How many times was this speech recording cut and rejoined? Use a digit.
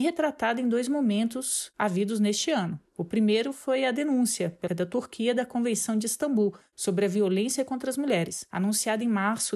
1